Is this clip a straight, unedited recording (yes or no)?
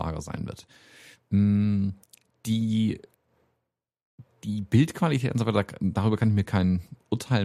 yes